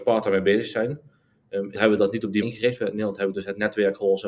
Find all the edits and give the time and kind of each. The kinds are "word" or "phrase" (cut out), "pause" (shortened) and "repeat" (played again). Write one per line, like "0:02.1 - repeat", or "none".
0:01.7 - word
0:02.4 - word